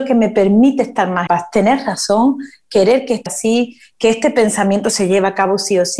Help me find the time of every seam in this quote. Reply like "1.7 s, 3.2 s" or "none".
1.3 s, 3.3 s